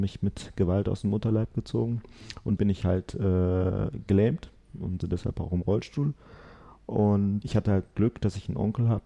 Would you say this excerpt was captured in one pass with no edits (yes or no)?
no